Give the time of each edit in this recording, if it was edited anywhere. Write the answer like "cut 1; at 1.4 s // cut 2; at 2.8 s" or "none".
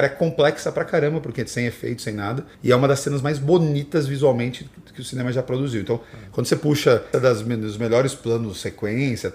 cut 1; at 2.5 s // cut 2; at 7.1 s